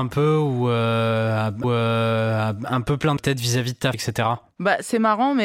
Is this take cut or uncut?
cut